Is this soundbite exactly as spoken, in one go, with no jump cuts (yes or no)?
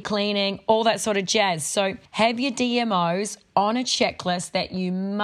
yes